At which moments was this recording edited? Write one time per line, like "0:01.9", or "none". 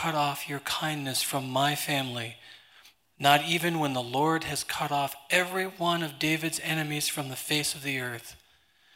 none